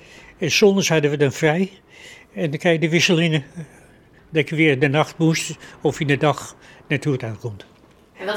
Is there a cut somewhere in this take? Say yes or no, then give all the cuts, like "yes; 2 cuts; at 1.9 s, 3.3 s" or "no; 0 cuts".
no; 0 cuts